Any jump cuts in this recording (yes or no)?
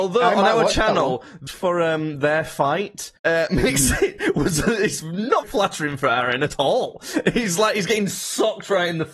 yes